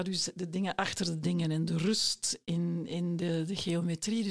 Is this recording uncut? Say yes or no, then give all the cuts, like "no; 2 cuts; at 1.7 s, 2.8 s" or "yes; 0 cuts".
yes; 0 cuts